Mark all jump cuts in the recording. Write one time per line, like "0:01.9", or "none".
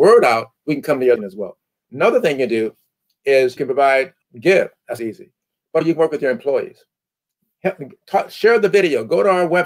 0:01.2
0:03.6
0:04.2
0:05.0
0:05.8